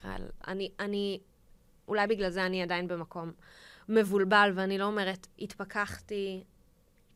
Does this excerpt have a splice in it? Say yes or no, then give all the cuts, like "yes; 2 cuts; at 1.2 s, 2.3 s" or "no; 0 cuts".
no; 0 cuts